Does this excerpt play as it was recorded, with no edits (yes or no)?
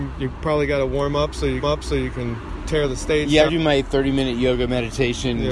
no